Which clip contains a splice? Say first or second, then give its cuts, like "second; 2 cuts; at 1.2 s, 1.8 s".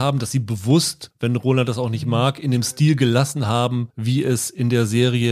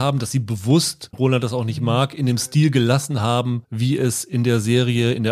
second; 1 cut; at 1.1 s